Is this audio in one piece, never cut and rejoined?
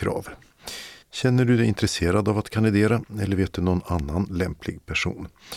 no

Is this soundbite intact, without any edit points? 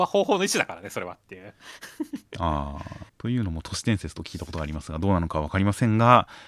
no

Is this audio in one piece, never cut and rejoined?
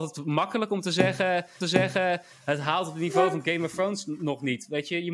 no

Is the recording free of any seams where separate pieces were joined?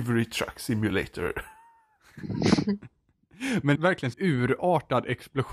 no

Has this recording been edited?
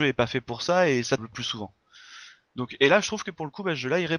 yes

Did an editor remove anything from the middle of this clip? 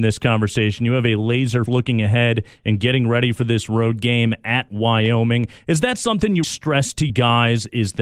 yes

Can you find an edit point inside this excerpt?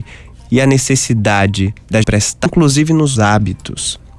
yes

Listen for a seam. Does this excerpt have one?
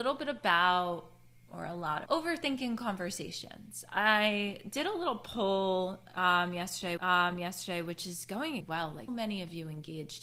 yes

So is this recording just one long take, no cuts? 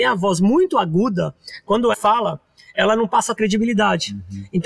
no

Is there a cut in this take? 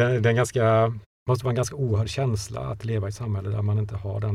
yes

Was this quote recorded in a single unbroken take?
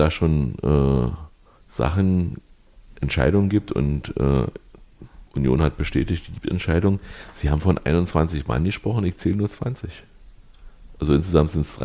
no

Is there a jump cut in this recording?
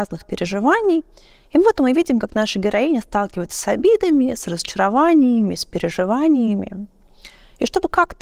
no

